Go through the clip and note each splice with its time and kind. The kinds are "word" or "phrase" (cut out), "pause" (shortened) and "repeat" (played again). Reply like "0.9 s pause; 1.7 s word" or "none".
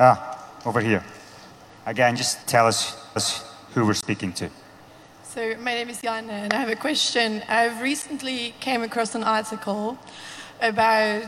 1.5 s pause; 2.4 s pause; 3.2 s repeat